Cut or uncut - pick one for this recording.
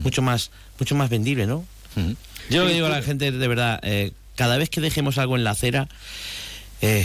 uncut